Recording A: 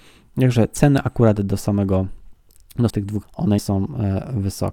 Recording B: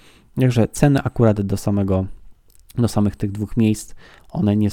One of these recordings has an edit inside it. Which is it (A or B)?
A